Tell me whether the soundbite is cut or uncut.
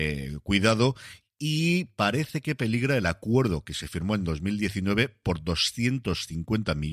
uncut